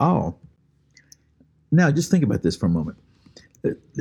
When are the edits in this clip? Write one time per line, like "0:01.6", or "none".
none